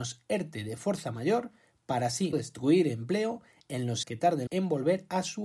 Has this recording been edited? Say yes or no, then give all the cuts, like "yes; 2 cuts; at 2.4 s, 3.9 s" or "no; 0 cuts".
yes; 3 cuts; at 2.3 s, 4.0 s, 4.5 s